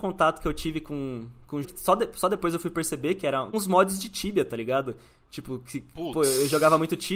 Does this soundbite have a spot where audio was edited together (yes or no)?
yes